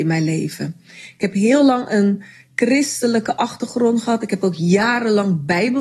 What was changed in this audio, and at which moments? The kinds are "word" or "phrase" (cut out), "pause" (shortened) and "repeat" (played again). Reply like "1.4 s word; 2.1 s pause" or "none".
none

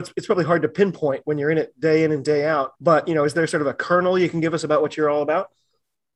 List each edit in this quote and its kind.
2.8 s pause

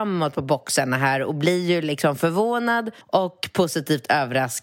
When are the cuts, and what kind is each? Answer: 3.0 s pause

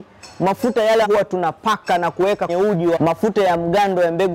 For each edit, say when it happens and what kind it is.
1.0 s word; 2.5 s word; 3.0 s word

